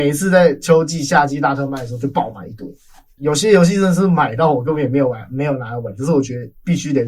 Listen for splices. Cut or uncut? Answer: cut